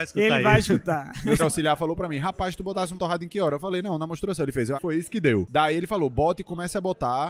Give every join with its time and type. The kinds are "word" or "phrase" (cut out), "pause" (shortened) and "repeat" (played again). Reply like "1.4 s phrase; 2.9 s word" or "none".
1.4 s word; 3.0 s word; 4.7 s word